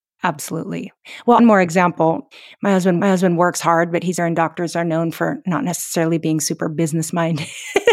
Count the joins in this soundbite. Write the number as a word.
three